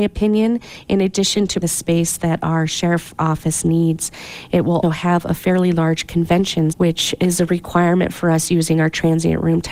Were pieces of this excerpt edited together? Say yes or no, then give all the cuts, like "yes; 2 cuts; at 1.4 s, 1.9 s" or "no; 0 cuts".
yes; 3 cuts; at 1.6 s, 4.8 s, 6.7 s